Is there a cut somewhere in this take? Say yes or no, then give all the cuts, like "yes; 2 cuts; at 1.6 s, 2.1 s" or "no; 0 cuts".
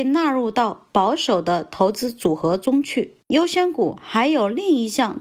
yes; 1 cut; at 3.2 s